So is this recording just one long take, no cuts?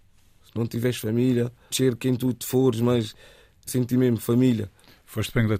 no; 2 cuts; at 1.7 s, 3.7 s

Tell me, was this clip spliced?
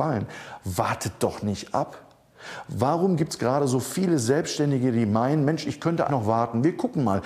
yes; 1 cut; at 6.1 s

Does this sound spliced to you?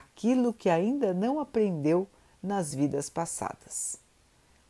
no; 0 cuts

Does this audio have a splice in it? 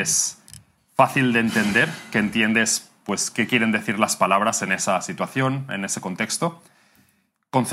no; 0 cuts

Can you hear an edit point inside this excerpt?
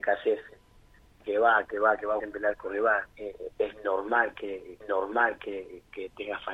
yes; 4 cuts; at 1.2 s, 2.2 s, 3.1 s, 4.8 s

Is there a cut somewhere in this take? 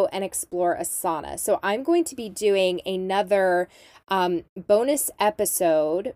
no; 0 cuts

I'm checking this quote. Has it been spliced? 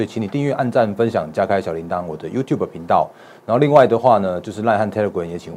no; 0 cuts

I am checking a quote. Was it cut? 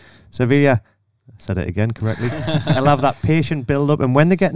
no; 0 cuts

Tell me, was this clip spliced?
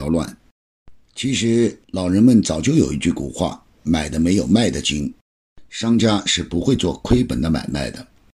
yes; 2 cuts; at 1.8 s, 5.2 s

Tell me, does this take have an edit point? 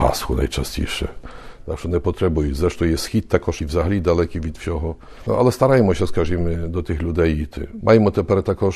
yes; 1 cut; at 3.6 s

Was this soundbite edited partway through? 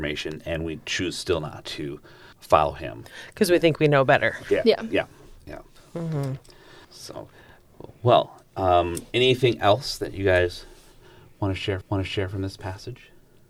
yes; 3 cuts; at 2.3 s, 6.8 s, 11.8 s

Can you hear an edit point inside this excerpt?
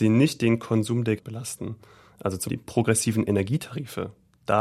yes; 2 cuts; at 1.2 s, 2.5 s

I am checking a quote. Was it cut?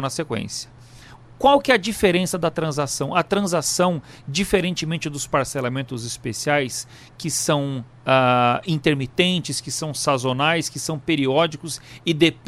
no; 0 cuts

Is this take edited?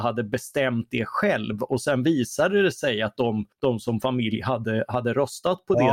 yes; 1 cut; at 3.5 s

